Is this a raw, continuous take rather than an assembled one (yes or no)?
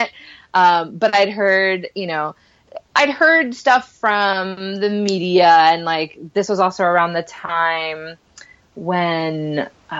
yes